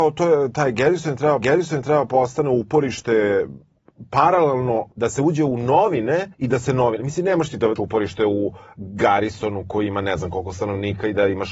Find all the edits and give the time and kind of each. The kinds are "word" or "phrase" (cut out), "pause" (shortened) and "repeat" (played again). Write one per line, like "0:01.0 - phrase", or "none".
0:01.4 - repeat
0:04.9 - pause
0:06.3 - pause
0:07.8 - word